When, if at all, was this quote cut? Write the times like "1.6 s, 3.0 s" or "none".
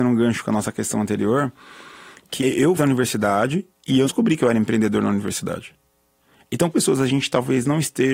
2.4 s, 2.8 s, 4.0 s, 6.7 s